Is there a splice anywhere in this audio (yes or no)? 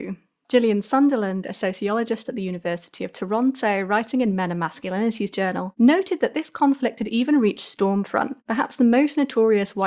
no